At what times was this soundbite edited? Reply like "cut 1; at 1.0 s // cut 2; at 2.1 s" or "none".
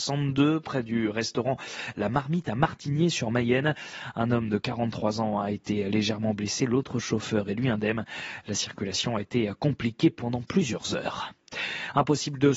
none